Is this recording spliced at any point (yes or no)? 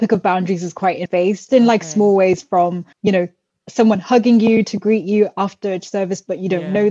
yes